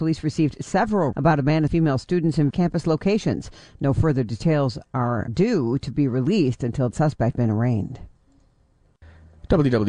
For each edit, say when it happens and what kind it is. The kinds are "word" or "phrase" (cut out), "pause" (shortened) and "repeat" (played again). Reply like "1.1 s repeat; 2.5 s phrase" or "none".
1.1 s word; 1.7 s word; 2.5 s word; 5.3 s word; 6.9 s word; 7.3 s word

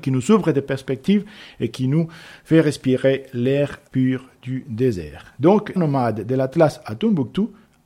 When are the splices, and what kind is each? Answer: 3.9 s pause; 5.8 s phrase

